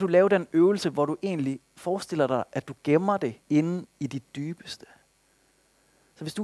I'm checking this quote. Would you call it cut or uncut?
cut